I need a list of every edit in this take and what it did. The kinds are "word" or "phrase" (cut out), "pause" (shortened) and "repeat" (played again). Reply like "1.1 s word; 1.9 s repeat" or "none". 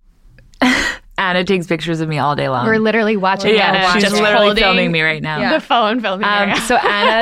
none